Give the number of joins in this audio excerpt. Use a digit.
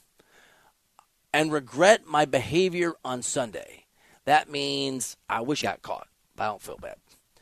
1